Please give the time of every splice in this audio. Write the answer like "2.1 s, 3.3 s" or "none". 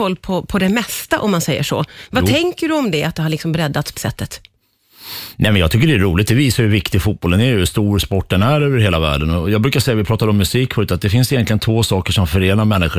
4.0 s